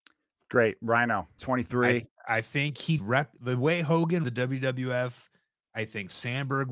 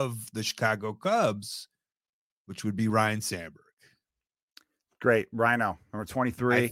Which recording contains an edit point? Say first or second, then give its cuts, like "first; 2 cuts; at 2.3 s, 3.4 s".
first; 3 cuts; at 1.4 s, 3.0 s, 4.2 s